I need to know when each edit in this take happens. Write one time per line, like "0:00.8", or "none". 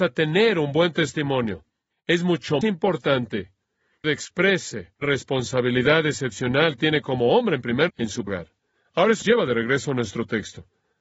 0:02.6
0:04.0
0:05.0
0:06.8
0:07.9
0:08.3
0:09.2